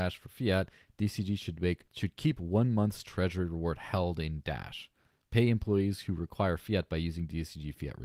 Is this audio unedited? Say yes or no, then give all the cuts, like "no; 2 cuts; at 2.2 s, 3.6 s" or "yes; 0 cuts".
no; 1 cut; at 1.9 s